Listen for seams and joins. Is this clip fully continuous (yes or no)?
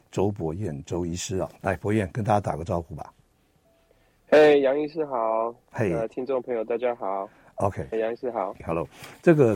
no